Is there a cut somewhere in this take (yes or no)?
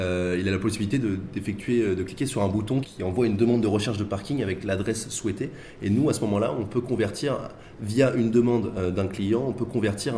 yes